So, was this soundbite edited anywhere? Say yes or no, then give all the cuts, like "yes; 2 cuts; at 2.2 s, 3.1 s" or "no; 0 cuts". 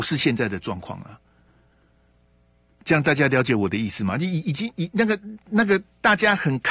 no; 0 cuts